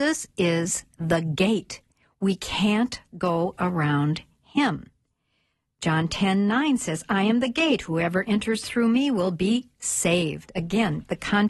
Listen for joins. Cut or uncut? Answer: uncut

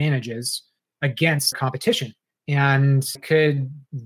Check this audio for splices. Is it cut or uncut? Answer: cut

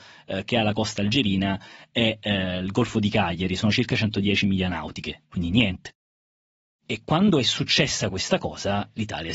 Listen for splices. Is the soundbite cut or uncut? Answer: uncut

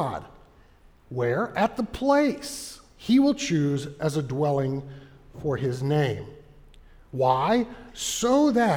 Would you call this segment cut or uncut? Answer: uncut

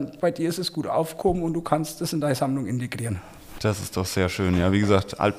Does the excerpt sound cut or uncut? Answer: uncut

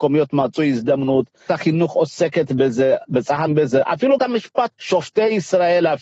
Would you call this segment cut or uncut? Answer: cut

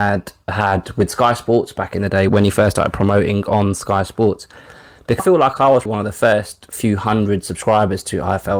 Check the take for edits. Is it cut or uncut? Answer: cut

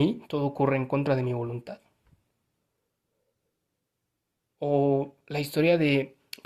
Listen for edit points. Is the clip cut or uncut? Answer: uncut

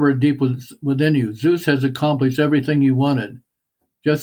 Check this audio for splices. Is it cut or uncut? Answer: uncut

